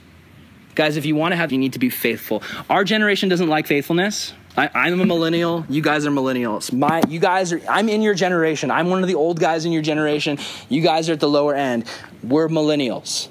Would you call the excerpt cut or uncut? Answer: cut